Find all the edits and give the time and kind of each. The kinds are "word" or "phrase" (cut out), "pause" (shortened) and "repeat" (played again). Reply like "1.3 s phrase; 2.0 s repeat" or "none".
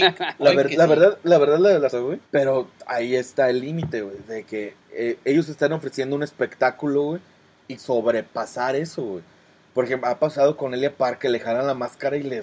1.9 s phrase; 2.2 s pause; 4.8 s pause; 7.8 s phrase